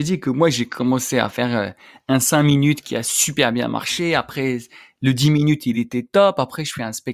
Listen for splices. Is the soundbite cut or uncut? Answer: uncut